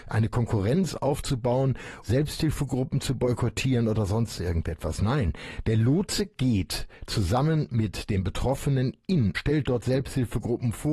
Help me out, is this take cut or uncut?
cut